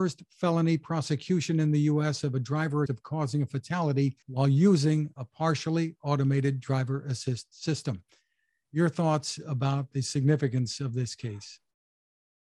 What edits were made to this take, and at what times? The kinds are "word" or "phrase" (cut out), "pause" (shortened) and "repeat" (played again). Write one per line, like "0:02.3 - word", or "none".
0:02.9 - word
0:04.2 - pause